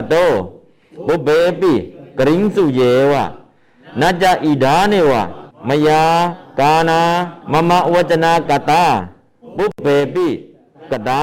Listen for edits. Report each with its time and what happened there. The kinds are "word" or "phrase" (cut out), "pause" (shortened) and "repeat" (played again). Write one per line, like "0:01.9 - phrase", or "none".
0:05.5 - pause
0:07.4 - pause
0:08.5 - word